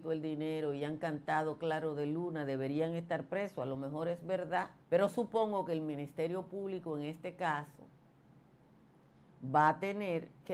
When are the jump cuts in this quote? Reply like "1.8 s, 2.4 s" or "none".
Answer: 4.8 s